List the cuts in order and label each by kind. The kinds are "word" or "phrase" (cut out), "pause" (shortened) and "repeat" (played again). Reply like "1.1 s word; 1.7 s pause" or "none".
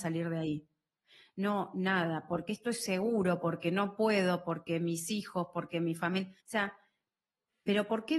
6.4 s pause